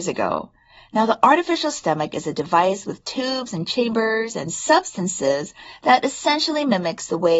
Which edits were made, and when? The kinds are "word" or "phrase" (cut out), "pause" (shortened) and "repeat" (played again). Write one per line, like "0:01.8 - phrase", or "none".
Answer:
none

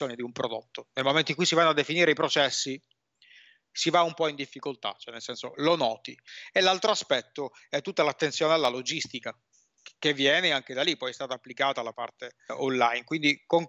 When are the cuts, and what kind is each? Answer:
0:05.5 - word
0:12.5 - word

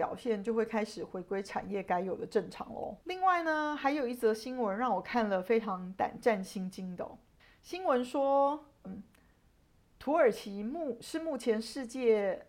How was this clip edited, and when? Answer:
0:03.0 - pause
0:07.4 - pause
0:08.8 - word

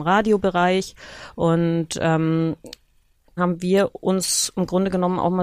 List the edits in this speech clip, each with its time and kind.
0:03.4 - word

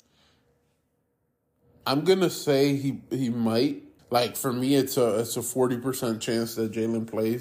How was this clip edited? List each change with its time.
0:04.0 - pause

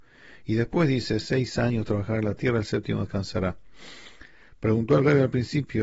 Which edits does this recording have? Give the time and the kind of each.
none

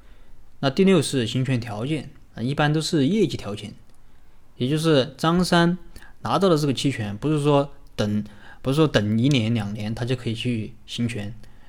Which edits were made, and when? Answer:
0:02.3 - pause

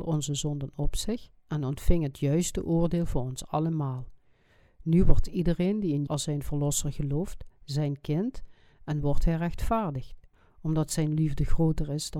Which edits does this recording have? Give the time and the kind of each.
0:06.1 - word
0:10.3 - pause

